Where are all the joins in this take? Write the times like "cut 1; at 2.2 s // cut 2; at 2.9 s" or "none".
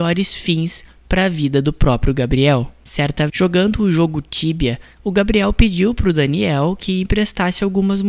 cut 1; at 3.3 s